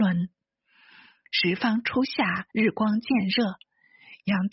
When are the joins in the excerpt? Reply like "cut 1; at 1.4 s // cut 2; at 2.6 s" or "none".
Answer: cut 1; at 2.5 s